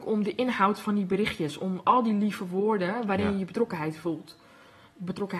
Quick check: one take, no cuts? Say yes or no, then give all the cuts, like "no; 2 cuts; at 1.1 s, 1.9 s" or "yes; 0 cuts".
yes; 0 cuts